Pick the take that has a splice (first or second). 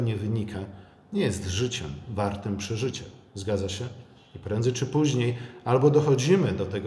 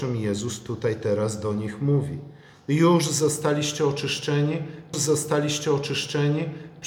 second